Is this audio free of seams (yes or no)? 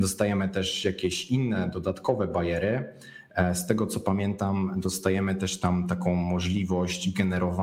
yes